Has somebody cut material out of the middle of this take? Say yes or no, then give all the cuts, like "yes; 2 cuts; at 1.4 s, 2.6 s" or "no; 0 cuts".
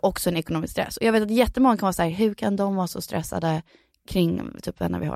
no; 0 cuts